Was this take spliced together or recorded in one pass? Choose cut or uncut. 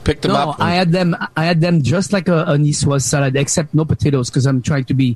uncut